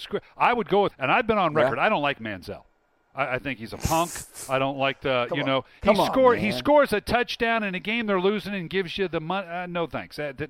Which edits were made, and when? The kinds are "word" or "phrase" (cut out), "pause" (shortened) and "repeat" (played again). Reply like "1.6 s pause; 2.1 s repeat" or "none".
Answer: 0.9 s word